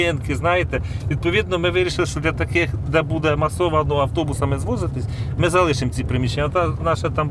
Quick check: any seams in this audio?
no; 0 cuts

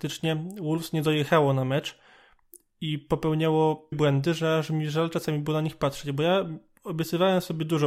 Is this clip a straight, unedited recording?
no; 1 cut; at 3.9 s

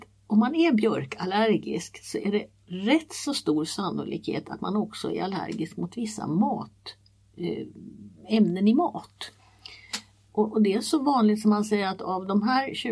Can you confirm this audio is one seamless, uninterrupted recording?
yes; 0 cuts

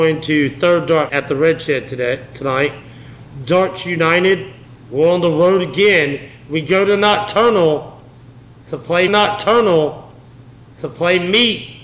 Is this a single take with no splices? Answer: no; 2 cuts; at 1.1 s, 9.1 s

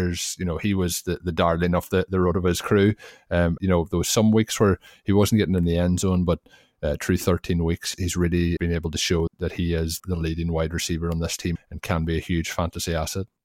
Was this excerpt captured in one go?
no; 6 cuts; at 3.6 s, 7.9 s, 8.6 s, 9.3 s, 10.0 s, 11.6 s

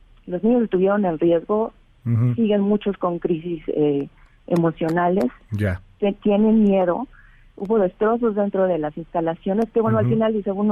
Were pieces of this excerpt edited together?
no; 0 cuts

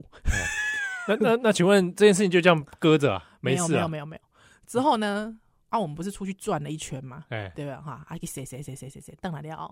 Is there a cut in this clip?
no; 0 cuts

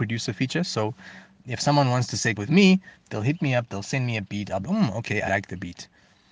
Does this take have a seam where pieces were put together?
yes; 3 cuts; at 2.4 s, 4.6 s, 5.3 s

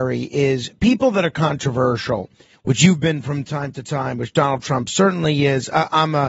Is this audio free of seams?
yes; 0 cuts

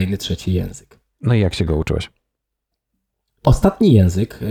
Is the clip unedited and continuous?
no; 1 cut; at 3.4 s

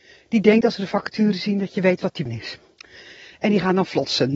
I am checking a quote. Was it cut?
yes; 1 cut; at 2.3 s

